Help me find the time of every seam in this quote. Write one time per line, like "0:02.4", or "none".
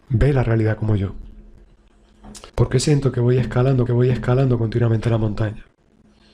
0:02.5
0:03.9